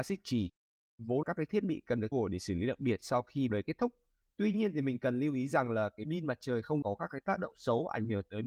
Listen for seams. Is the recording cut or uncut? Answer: cut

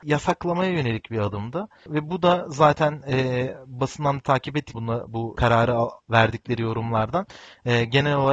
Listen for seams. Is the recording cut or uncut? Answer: cut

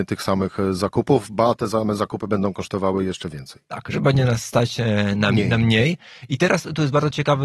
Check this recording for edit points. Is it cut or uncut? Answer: uncut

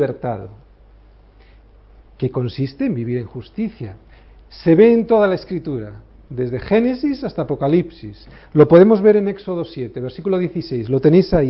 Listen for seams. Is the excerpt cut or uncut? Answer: uncut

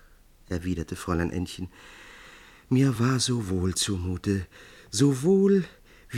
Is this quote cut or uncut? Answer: uncut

